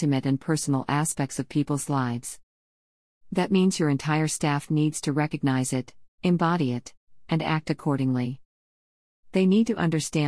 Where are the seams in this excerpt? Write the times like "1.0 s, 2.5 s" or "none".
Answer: none